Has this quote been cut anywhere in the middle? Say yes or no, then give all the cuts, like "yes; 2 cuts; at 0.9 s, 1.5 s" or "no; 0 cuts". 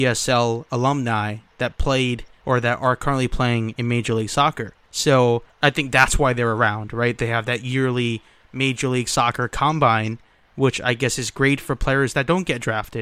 no; 0 cuts